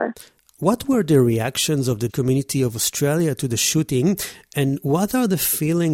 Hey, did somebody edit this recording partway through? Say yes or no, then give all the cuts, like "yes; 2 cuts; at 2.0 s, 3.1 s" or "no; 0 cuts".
yes; 1 cut; at 2.1 s